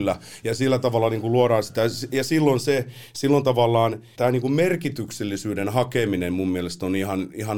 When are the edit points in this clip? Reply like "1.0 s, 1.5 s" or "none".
4.1 s